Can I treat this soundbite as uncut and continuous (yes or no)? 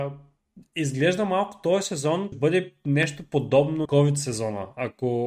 no